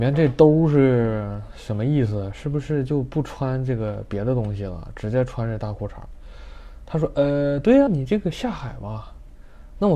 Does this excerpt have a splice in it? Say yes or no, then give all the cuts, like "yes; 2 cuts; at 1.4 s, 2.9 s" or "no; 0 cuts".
yes; 1 cut; at 7.9 s